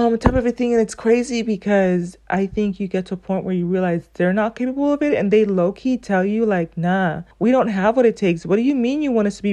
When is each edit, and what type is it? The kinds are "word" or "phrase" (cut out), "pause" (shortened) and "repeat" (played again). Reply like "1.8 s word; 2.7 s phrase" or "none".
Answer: 7.3 s pause

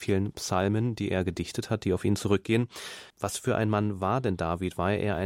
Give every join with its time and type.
3.1 s pause

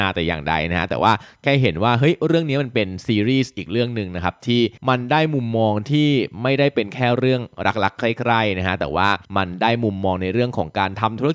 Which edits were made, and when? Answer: 4.8 s pause; 9.2 s pause

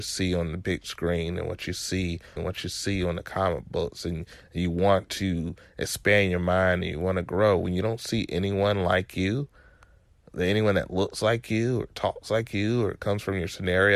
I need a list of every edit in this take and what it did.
2.4 s phrase

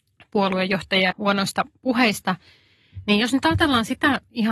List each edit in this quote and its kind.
1.1 s word

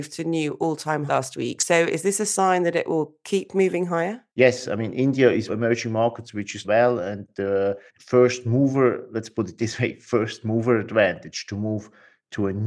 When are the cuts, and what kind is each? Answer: 1.1 s word; 4.3 s pause; 5.5 s phrase; 6.6 s phrase; 7.9 s pause

